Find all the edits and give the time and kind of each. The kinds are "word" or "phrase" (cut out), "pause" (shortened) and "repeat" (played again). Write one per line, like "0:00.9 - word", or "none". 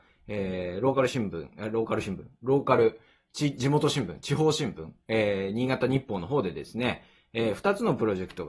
none